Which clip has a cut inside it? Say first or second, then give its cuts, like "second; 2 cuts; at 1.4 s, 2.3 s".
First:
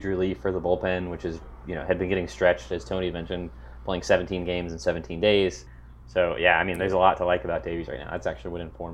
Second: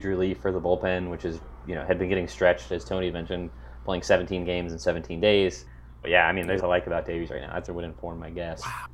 second; 3 cuts; at 6.0 s, 6.6 s, 7.7 s